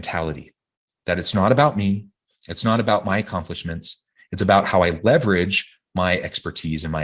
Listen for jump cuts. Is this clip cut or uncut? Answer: uncut